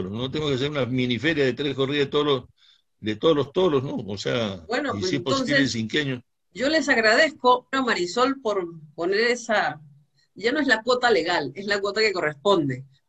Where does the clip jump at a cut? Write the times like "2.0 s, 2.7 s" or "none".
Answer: 7.7 s

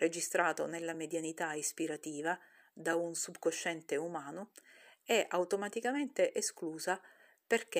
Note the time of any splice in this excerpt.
none

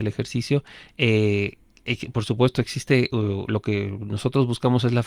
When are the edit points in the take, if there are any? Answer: none

